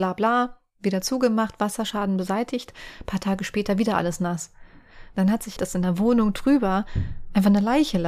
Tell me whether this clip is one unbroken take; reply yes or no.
no